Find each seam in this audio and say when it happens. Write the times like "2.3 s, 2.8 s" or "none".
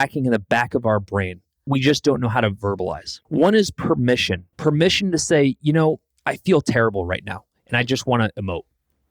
1.7 s, 3.2 s, 4.5 s

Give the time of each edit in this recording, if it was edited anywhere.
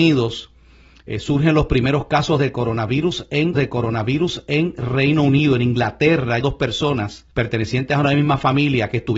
3.5 s, 6.4 s, 7.3 s

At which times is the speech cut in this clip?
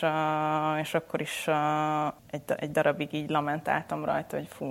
2.2 s

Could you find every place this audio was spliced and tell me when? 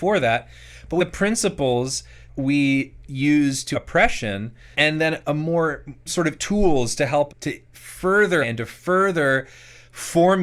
1.0 s, 2.3 s, 3.7 s, 4.7 s, 6.1 s, 6.4 s, 7.3 s, 8.4 s

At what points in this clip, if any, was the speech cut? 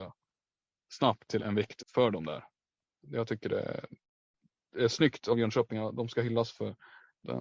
1.4 s, 1.8 s

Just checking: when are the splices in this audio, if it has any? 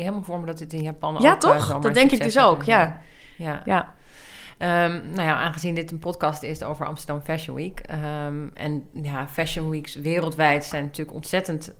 8.9 s

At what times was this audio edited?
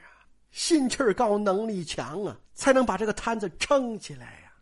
2.4 s

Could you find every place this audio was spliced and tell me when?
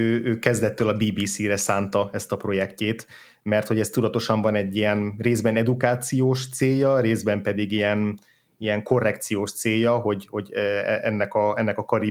none

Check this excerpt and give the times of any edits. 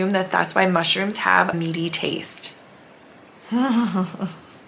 1.5 s

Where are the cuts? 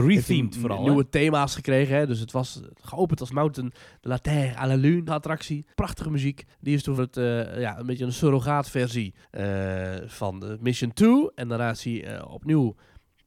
3.3 s, 5.1 s, 5.7 s, 6.5 s, 7.0 s, 9.2 s

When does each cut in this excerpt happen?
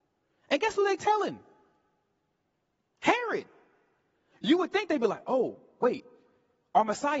none

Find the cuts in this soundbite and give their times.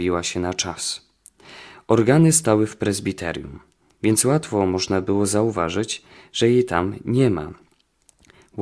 none

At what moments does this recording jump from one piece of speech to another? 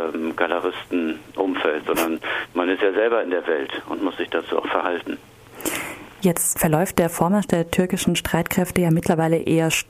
6.6 s

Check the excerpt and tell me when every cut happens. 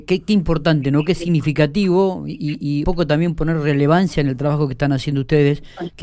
2.8 s

